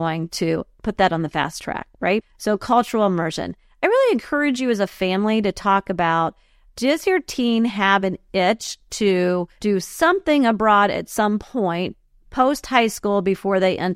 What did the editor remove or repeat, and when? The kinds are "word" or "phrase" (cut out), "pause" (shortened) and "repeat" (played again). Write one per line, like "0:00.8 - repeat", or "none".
none